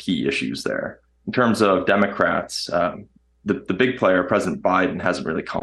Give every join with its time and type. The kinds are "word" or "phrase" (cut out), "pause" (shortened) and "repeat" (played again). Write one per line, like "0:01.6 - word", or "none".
none